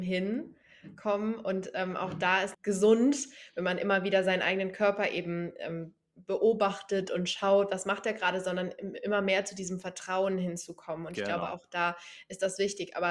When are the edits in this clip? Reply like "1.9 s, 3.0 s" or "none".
2.5 s

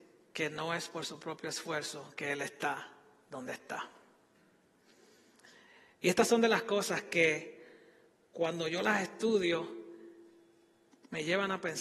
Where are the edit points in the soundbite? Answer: none

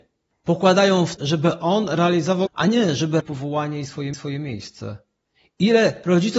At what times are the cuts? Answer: 1.2 s, 2.5 s, 3.2 s, 4.1 s

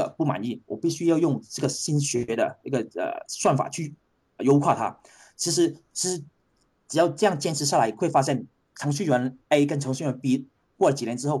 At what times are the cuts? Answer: none

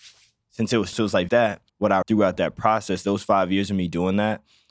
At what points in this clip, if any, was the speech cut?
0.9 s, 1.3 s, 1.7 s, 2.0 s

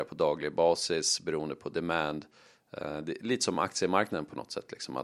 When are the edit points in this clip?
none

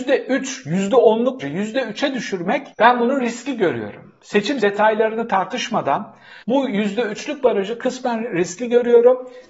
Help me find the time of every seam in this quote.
1.4 s, 2.7 s, 4.6 s, 6.4 s

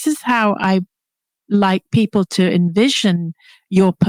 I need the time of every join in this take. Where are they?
none

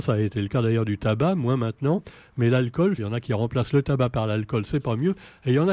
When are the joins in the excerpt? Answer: 3.0 s

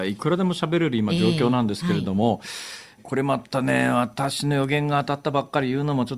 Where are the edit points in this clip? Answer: 3.0 s

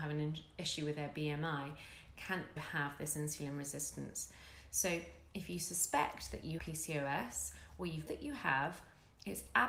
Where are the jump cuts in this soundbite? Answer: 2.6 s, 6.6 s, 8.1 s

